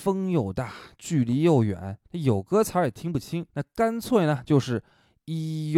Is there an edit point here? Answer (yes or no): yes